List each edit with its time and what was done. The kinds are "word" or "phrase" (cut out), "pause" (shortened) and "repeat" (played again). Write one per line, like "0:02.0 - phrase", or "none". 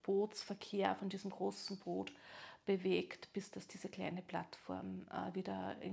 none

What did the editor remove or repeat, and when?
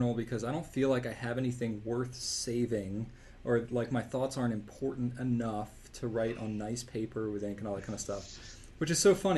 none

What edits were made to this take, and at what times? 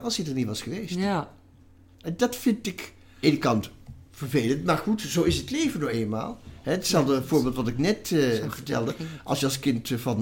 0:03.2 - phrase

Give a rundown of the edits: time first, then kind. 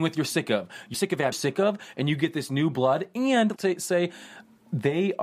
0:00.9 - phrase
0:01.3 - phrase
0:03.6 - word

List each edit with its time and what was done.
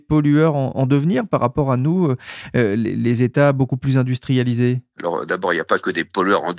none

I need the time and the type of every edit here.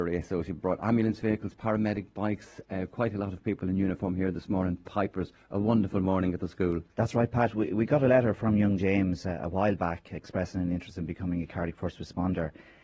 0:06.9 - pause

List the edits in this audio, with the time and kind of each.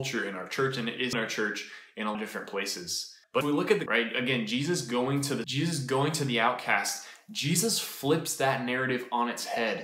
0:01.1 - word
0:02.1 - word
0:03.4 - word
0:03.9 - word
0:05.4 - word

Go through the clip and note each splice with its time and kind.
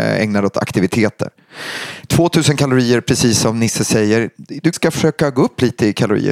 0:04.7 - word

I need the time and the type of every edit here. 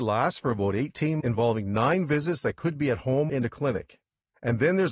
0:01.2 - word
0:03.3 - word

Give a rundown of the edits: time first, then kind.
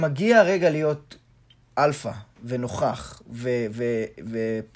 none

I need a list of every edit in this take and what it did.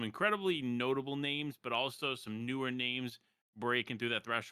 none

